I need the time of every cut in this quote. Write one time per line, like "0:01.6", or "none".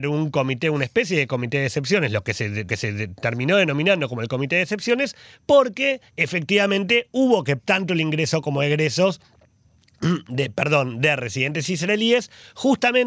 0:02.7
0:06.1
0:07.6